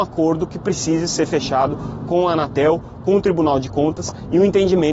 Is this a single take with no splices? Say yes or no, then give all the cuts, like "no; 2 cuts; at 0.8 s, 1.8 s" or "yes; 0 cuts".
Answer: yes; 0 cuts